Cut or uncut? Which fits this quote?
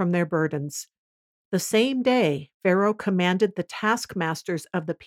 uncut